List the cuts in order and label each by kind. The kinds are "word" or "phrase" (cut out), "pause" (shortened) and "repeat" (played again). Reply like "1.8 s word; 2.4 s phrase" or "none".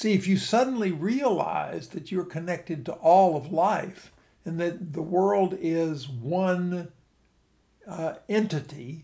none

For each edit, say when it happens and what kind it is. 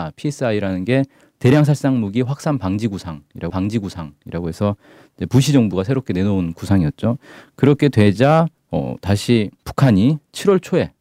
3.5 s repeat; 8.6 s pause; 9.6 s pause

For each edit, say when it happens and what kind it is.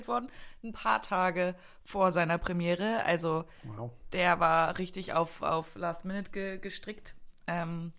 none

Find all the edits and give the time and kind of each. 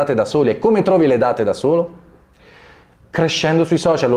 none

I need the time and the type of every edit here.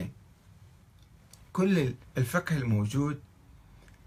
2.0 s pause

